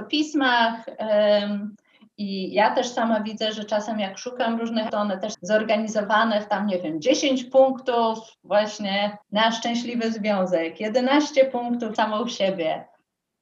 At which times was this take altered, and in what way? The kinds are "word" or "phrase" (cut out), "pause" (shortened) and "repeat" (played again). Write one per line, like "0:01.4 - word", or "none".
0:04.9 - word
0:05.3 - word
0:09.2 - pause
0:12.0 - phrase